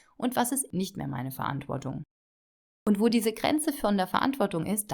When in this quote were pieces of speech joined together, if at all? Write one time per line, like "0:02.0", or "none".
none